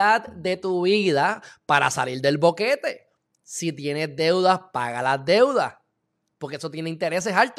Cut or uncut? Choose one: uncut